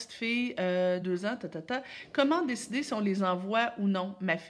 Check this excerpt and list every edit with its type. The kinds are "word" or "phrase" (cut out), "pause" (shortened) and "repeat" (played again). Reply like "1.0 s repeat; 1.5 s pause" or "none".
1.0 s word